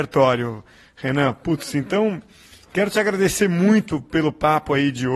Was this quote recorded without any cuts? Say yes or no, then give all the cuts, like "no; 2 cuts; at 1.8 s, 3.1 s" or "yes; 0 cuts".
yes; 0 cuts